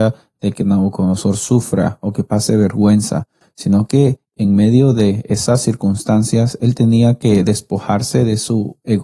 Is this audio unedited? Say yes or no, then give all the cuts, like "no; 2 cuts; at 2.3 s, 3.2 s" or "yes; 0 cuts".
yes; 0 cuts